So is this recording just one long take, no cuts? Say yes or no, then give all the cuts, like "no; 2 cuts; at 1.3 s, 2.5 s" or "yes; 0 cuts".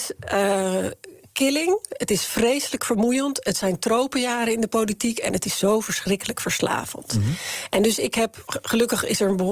yes; 0 cuts